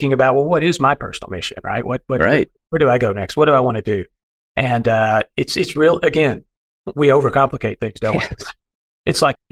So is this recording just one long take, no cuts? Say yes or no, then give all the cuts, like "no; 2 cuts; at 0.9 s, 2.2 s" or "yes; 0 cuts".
yes; 0 cuts